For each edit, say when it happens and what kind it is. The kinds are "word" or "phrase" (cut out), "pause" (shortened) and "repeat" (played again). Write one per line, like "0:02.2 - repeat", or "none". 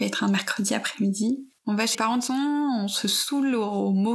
0:01.6 - pause
0:01.9 - word
0:02.3 - word